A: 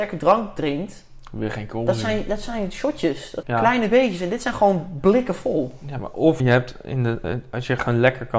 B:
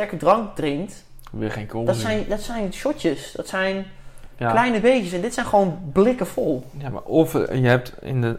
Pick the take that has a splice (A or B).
A